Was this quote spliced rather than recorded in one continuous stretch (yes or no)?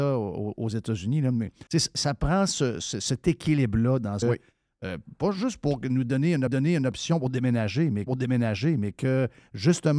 yes